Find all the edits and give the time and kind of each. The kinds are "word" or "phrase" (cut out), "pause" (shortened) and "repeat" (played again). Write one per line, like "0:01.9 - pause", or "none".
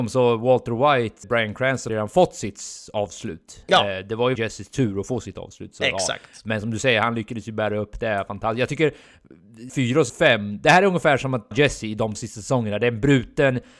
0:01.2 - word
0:01.9 - phrase
0:04.4 - word
0:09.7 - word
0:10.1 - word
0:11.5 - phrase
0:12.1 - word